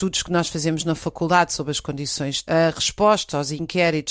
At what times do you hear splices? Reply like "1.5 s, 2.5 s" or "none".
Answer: 2.4 s